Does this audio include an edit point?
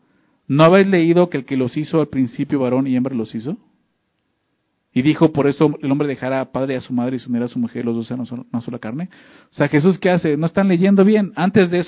no; 0 cuts

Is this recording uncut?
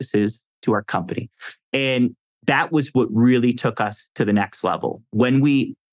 yes; 0 cuts

